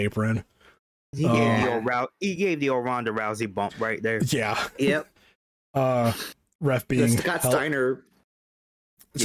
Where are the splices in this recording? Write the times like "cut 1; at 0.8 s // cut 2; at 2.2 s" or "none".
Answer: none